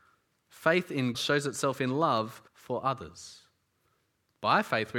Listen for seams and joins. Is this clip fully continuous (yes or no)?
no